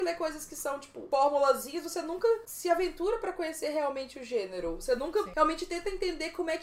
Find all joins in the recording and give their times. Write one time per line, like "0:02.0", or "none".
none